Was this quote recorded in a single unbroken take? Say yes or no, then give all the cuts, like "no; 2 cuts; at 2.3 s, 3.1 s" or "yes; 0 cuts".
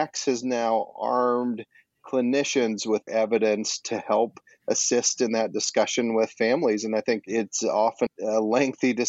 no; 2 cuts; at 3.1 s, 8.1 s